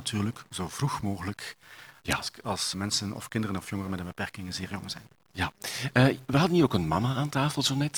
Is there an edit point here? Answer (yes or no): yes